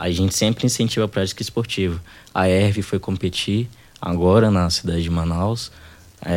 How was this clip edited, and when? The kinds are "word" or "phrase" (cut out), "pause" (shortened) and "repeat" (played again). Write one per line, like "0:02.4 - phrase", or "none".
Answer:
none